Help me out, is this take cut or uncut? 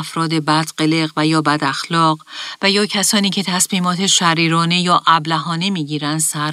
uncut